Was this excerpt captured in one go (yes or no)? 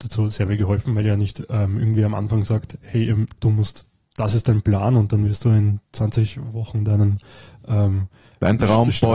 yes